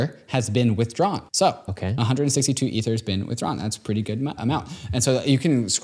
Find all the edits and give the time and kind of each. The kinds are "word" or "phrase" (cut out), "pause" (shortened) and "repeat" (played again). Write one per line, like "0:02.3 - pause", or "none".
0:01.3 - pause
0:04.4 - word